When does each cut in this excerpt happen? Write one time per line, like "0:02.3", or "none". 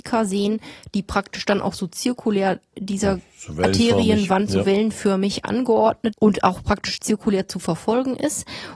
0:02.7
0:06.1